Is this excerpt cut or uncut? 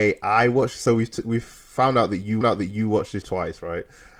cut